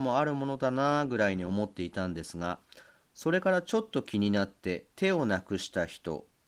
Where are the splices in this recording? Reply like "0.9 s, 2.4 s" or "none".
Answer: 4.9 s